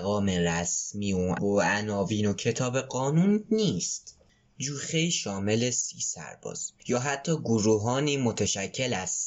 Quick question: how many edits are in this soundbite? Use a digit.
1